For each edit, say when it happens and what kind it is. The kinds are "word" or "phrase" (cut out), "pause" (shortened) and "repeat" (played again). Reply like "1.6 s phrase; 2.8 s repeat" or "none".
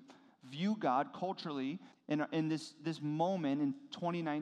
1.9 s pause